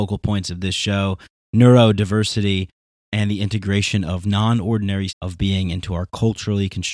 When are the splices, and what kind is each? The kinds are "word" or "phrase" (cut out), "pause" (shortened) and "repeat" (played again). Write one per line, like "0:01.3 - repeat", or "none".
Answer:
0:05.1 - word